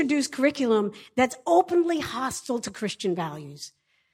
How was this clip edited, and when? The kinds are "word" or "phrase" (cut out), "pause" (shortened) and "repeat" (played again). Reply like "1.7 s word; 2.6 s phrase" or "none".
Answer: none